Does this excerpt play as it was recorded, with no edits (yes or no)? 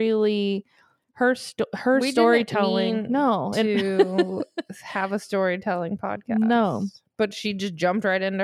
yes